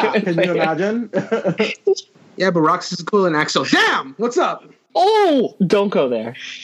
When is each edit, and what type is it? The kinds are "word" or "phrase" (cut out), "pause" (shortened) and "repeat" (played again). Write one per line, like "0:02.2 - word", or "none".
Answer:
none